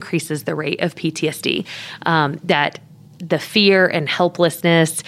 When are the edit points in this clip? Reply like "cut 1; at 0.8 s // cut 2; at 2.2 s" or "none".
none